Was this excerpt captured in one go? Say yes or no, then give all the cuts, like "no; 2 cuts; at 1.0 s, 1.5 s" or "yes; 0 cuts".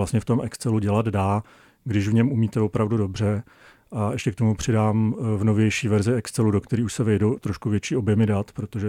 yes; 0 cuts